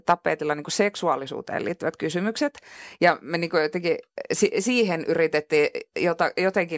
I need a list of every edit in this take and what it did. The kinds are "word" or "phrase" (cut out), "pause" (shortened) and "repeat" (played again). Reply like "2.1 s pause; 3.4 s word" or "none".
none

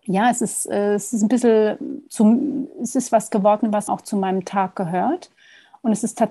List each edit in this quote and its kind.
2.1 s word; 3.9 s word

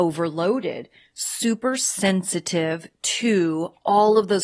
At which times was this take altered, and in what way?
none

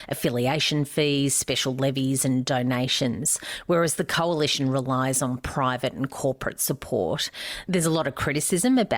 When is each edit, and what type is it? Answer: none

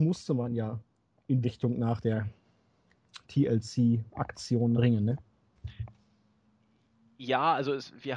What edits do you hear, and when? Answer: 1.4 s word; 4.8 s word

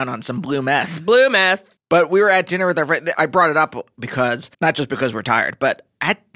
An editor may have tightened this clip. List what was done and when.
1.8 s pause; 4.5 s pause

